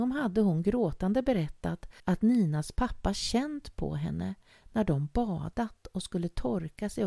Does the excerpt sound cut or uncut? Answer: cut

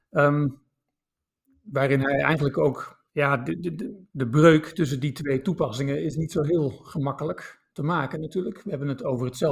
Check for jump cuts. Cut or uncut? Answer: cut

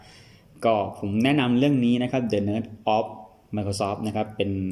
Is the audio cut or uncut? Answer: uncut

